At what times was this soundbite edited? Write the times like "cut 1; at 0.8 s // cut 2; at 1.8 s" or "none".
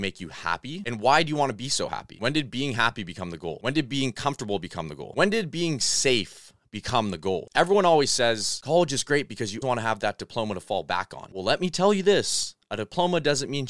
cut 1; at 9.6 s